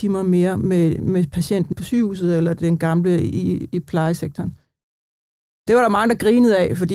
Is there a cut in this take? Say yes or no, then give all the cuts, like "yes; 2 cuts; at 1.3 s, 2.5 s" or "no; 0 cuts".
yes; 1 cut; at 1.7 s